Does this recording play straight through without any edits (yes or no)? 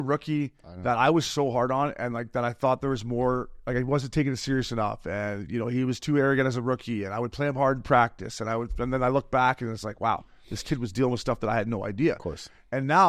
yes